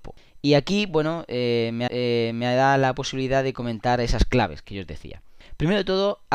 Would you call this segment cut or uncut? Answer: cut